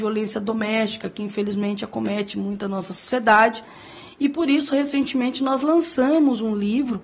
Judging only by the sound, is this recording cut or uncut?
uncut